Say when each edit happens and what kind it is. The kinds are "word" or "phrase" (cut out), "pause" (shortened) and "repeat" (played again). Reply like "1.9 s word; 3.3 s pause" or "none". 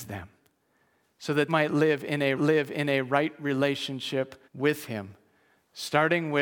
1.5 s word; 2.4 s repeat; 4.4 s pause

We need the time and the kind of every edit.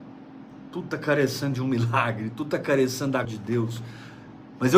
3.2 s word

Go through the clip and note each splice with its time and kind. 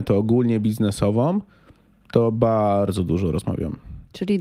none

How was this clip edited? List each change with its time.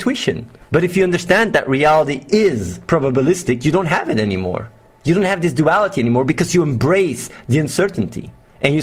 none

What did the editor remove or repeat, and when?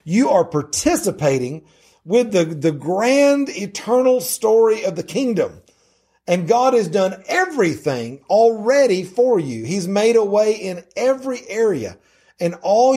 none

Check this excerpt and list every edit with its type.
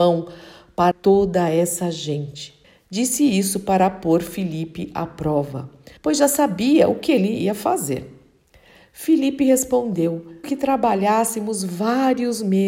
0.9 s word; 2.6 s pause; 6.0 s pause; 10.4 s word

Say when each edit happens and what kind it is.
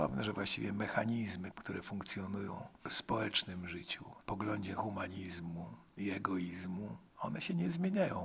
4.2 s word; 4.8 s phrase

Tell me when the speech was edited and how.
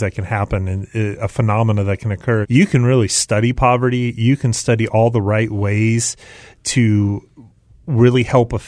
2.4 s word

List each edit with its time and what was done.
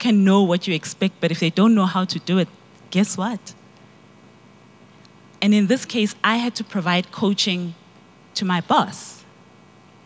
none

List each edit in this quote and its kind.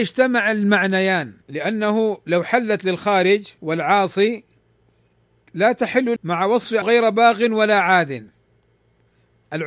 1.4 s pause; 3.6 s pause; 6.2 s word; 6.8 s word

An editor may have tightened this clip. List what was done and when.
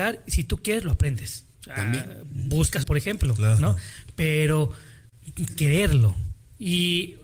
2.8 s phrase; 5.6 s word

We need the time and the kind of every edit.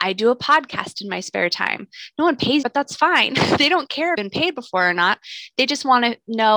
2.6 s phrase; 4.1 s phrase

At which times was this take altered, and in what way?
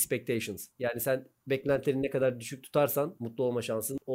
none

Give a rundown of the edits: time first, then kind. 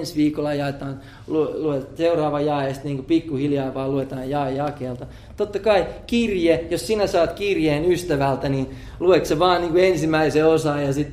none

